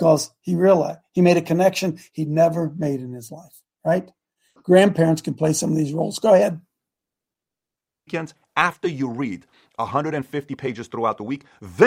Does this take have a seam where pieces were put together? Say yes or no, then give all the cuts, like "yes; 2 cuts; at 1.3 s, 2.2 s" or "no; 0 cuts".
no; 0 cuts